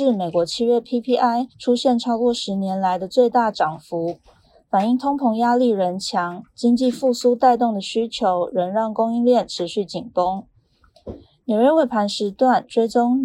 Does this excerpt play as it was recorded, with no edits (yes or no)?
no